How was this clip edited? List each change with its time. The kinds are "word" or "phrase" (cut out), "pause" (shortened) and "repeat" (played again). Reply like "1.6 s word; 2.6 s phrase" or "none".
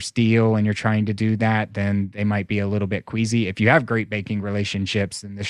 none